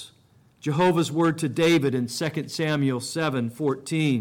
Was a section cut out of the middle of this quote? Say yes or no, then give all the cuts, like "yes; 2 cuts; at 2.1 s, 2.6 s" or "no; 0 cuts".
no; 0 cuts